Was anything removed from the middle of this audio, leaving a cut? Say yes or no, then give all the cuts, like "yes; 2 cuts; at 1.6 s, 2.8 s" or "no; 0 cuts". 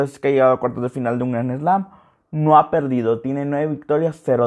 no; 0 cuts